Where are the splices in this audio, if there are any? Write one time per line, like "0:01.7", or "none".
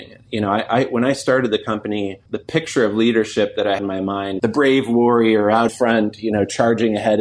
0:02.3
0:03.8
0:04.4
0:05.7